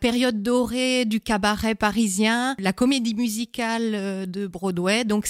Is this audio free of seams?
yes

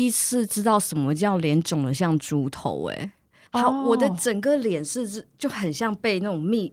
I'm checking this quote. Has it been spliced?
no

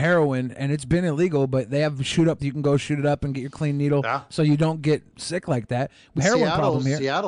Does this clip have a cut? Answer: yes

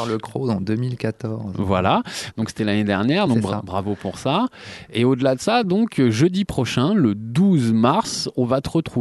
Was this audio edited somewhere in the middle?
no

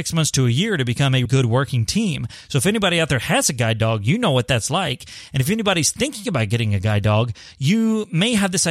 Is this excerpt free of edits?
no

